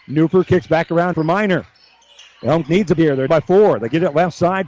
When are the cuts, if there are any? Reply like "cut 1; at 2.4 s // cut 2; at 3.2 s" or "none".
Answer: cut 1; at 1.1 s // cut 2; at 2.6 s // cut 3; at 3.0 s // cut 4; at 3.3 s